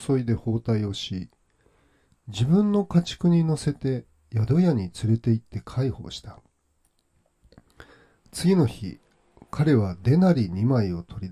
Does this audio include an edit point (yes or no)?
no